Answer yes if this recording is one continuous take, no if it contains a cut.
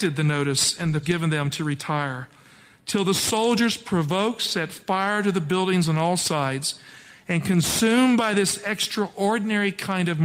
no